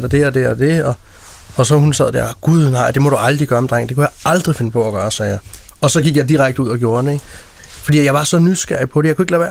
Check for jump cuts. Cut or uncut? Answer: uncut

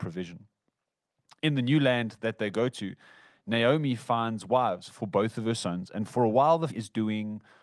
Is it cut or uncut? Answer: cut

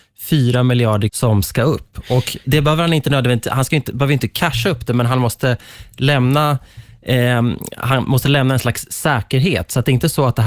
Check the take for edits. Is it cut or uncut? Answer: cut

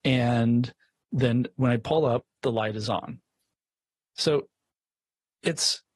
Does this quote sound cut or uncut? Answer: uncut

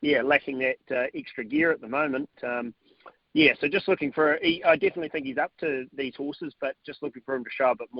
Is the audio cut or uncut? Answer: uncut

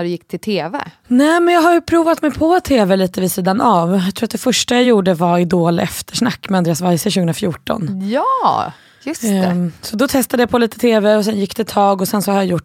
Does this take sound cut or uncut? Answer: uncut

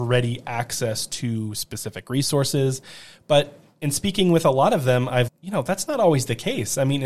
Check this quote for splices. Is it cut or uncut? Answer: cut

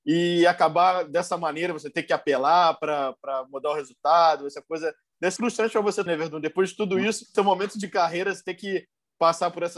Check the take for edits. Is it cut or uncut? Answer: cut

